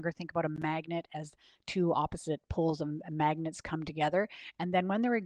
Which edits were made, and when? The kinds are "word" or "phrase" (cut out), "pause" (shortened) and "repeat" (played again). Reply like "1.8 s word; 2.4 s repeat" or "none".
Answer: none